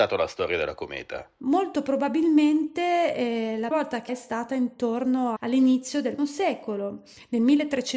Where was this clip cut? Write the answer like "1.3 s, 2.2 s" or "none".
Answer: 3.7 s, 4.1 s, 5.4 s, 6.2 s